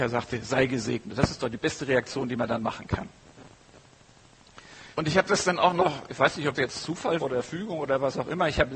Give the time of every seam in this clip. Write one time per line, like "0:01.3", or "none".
0:04.9
0:06.6
0:07.2